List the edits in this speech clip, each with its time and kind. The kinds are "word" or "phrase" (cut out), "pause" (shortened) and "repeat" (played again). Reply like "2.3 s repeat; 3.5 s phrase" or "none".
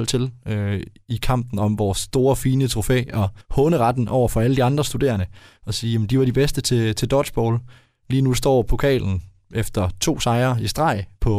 3.4 s pause